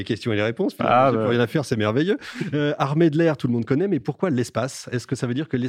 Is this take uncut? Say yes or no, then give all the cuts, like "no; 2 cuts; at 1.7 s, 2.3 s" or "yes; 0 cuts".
yes; 0 cuts